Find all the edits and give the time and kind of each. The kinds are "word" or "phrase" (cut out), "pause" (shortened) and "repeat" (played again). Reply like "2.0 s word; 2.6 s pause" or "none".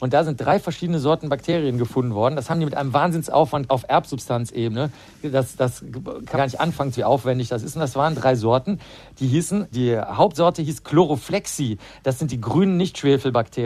3.7 s word; 6.3 s word; 7.0 s word; 9.7 s word